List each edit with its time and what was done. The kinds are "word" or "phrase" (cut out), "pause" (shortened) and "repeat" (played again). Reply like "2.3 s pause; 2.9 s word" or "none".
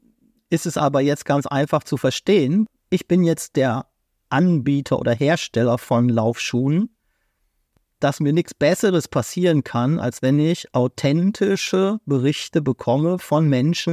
none

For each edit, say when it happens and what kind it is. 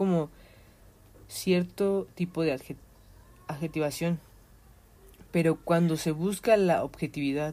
none

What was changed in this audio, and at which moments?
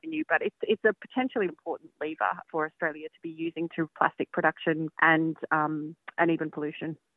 1.5 s word; 2.4 s word; 3.9 s word; 4.9 s word

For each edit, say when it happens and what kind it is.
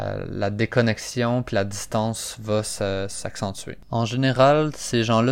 none

